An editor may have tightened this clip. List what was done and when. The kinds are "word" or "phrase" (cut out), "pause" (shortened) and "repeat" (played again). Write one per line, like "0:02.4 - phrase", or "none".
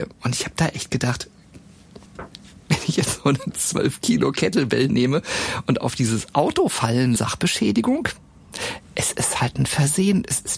0:02.1 - pause
0:07.2 - phrase